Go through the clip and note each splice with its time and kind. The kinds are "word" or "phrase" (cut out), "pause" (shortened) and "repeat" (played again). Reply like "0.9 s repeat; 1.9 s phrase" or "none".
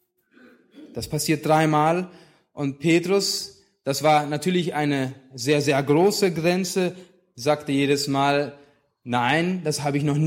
none